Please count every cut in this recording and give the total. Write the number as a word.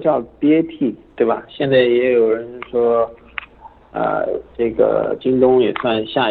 one